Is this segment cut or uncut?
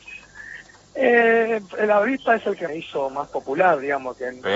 cut